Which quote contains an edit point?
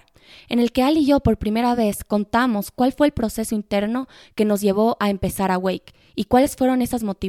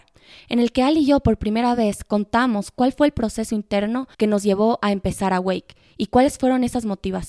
second; 1 cut; at 4.1 s

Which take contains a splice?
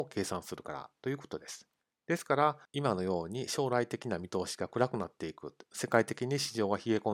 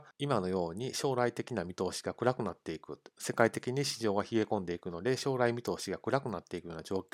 first; 1 cut; at 1.8 s

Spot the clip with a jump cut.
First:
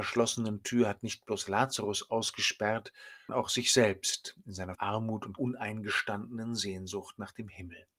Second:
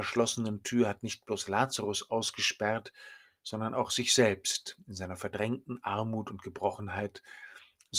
first; 3 cuts; at 3.3 s, 4.7 s, 5.4 s

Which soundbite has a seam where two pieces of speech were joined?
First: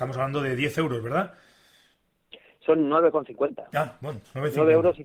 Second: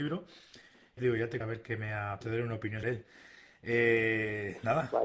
second; 4 cuts; at 1.0 s, 1.4 s, 2.2 s, 2.8 s

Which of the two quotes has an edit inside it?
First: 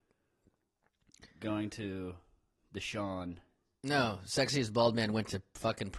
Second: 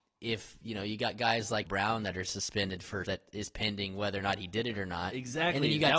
second; 2 cuts; at 1.7 s, 3.1 s

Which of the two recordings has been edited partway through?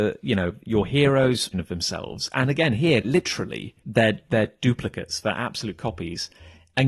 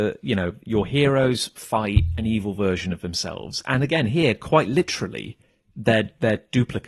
first; 3 cuts; at 1.5 s, 3.0 s, 3.8 s

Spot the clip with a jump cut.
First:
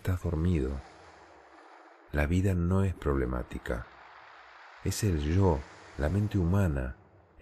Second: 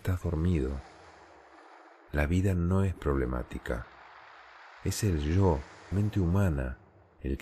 second; 1 cut; at 5.9 s

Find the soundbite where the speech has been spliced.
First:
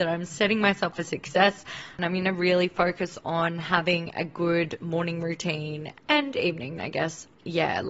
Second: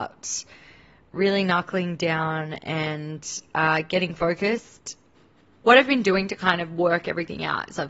first; 3 cuts; at 0.9 s, 6.0 s, 6.8 s

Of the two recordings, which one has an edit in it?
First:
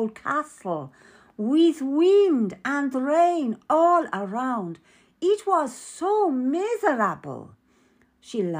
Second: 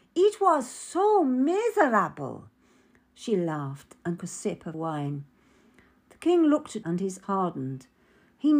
second; 4 cuts; at 4.2 s, 4.7 s, 6.8 s, 7.2 s

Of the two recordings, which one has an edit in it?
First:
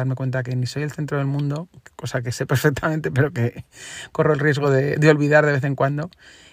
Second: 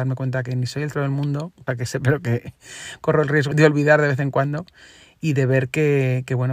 second; 4 cuts; at 0.9 s, 1.7 s, 2.0 s, 3.5 s

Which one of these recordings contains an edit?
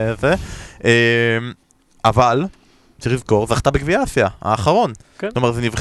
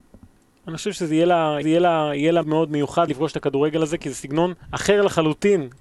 second; 4 cuts; at 1.6 s, 2.4 s, 3.1 s, 4.6 s

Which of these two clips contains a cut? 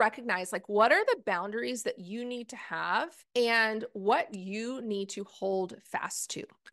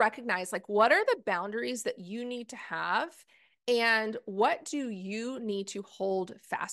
first; 2 cuts; at 3.2 s, 4.3 s

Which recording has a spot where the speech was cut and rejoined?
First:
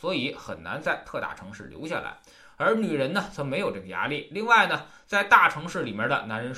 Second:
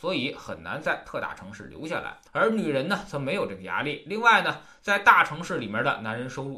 second; 1 cut; at 2.3 s

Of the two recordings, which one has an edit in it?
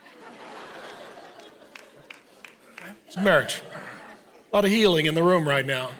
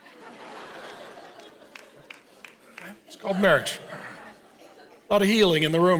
first; 2 cuts; at 3.2 s, 4.3 s

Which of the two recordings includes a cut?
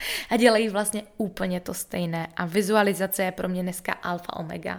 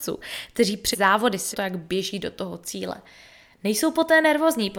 second; 2 cuts; at 0.9 s, 1.5 s

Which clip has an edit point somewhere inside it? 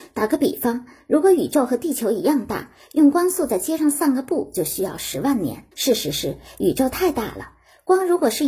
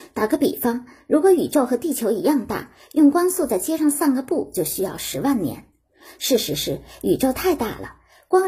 first; 1 cut; at 5.7 s

